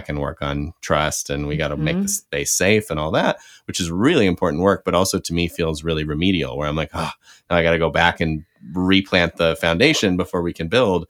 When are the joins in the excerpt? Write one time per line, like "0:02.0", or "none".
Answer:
none